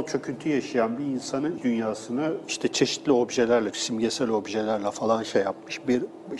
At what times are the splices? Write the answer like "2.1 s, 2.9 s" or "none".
1.6 s, 3.7 s